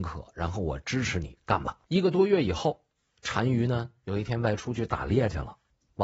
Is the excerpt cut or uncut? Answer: cut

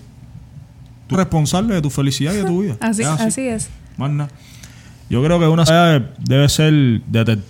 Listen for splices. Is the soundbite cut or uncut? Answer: cut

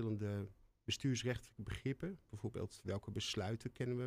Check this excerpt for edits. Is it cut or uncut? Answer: uncut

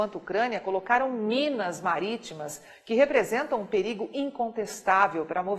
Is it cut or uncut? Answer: uncut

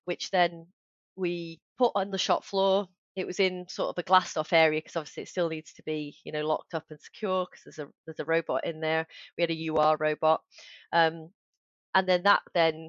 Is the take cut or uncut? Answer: uncut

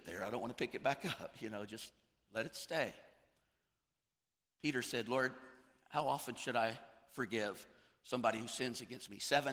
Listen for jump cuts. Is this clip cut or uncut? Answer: uncut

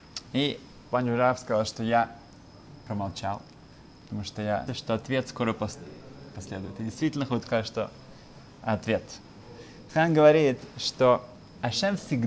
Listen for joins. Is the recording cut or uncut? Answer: cut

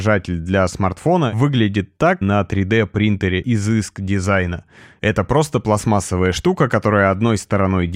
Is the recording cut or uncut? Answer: cut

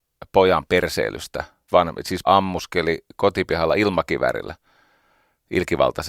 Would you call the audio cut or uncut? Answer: cut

